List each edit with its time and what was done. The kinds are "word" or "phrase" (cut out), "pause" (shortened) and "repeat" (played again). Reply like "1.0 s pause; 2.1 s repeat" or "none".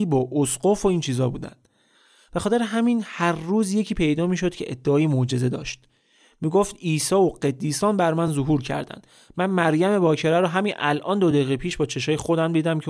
none